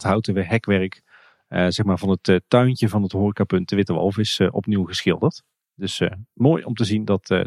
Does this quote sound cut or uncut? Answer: uncut